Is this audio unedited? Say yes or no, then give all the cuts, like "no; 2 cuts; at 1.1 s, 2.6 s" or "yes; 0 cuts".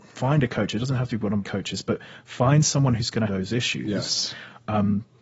no; 2 cuts; at 1.4 s, 3.3 s